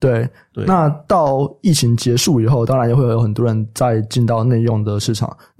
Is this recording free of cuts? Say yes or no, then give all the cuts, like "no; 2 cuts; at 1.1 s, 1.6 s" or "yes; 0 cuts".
yes; 0 cuts